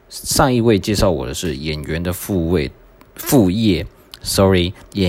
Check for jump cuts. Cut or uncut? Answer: uncut